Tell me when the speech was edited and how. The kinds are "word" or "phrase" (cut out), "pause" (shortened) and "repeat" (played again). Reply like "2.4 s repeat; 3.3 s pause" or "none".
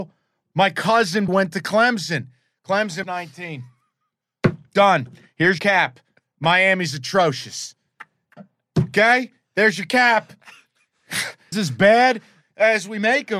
1.3 s word; 3.0 s word; 5.6 s word; 11.5 s word